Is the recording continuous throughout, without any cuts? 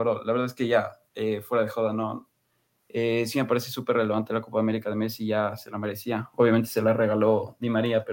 yes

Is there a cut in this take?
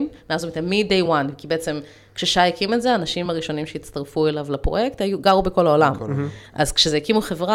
no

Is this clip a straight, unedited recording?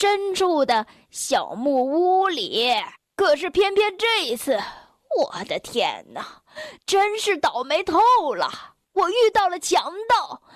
no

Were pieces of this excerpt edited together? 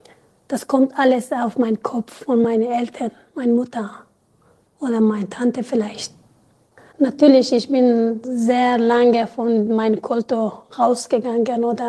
no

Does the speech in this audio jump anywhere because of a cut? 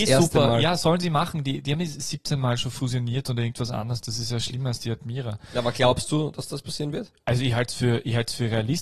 no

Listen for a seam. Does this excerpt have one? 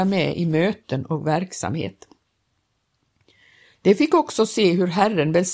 no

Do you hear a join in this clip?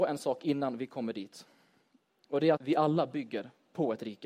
yes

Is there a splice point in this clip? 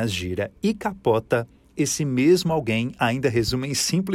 no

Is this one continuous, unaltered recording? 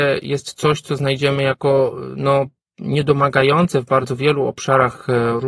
yes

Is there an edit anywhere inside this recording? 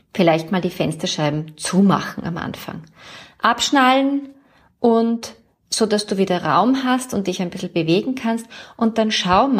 no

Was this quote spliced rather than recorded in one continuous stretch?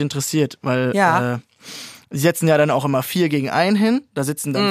no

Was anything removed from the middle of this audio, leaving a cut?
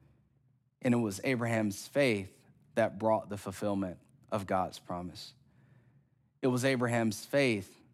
no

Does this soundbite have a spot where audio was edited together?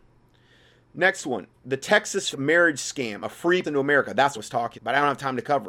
yes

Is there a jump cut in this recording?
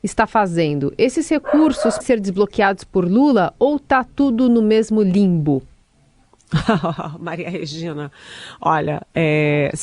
yes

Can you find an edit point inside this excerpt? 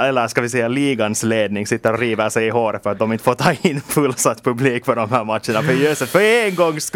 no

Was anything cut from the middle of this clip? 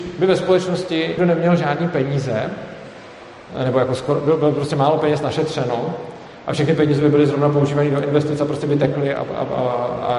yes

